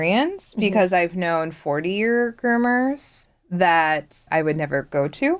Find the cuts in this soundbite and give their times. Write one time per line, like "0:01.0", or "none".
0:04.3